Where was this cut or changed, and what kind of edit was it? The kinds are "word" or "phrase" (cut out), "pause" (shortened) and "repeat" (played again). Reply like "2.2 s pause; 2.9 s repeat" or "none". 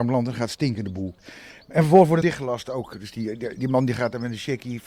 2.2 s word